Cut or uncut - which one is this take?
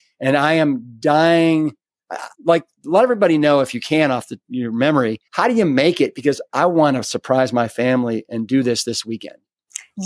cut